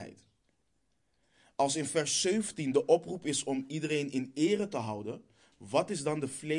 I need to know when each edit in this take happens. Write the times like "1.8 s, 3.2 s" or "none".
none